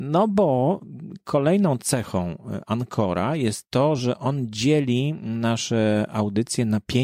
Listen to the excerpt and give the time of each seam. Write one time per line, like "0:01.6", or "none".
none